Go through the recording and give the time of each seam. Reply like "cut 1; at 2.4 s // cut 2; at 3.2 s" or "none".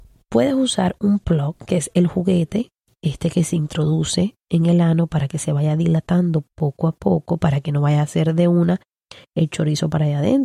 none